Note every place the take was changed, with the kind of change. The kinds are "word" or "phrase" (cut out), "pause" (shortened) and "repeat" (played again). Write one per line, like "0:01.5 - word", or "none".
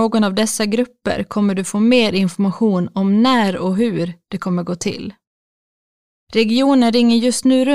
none